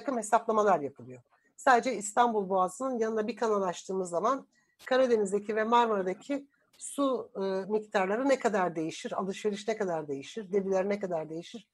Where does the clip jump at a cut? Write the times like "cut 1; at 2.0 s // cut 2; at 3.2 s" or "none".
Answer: none